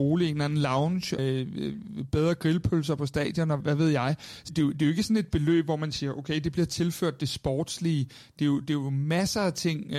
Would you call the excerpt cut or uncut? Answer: cut